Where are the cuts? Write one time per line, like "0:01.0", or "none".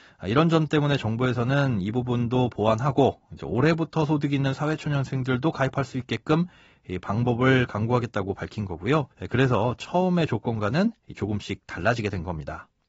0:09.1

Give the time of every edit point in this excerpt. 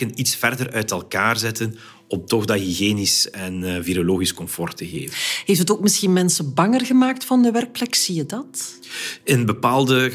none

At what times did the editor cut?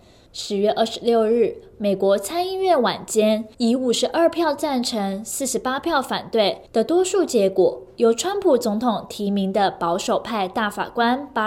0:03.5
0:06.7

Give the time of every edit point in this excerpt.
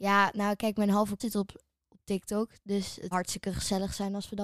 0:01.2
0:03.1

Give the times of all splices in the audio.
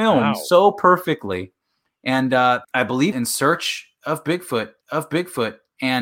0:02.6
0:03.1
0:04.8

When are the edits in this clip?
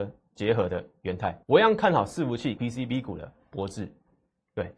0:01.4
0:02.6

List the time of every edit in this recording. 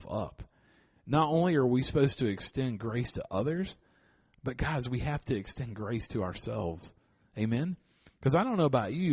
none

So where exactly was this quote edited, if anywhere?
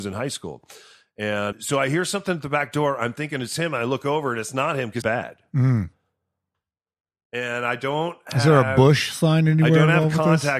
0:01.5
0:05.0

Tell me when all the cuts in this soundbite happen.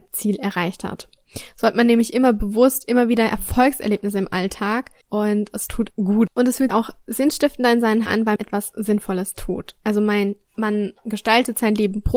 0:05.0
0:05.9
0:06.7
0:08.1
0:08.4
0:10.4

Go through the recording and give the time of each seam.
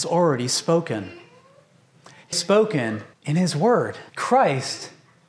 0:02.3
0:03.1
0:04.1

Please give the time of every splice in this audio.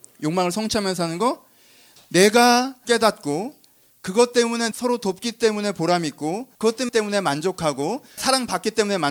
0:02.9
0:04.7
0:06.5
0:06.9
0:08.2

